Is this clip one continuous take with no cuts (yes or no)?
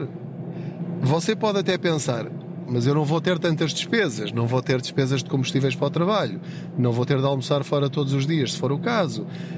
no